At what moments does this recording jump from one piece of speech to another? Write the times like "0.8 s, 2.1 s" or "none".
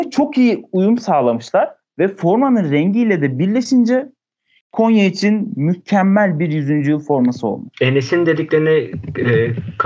7.7 s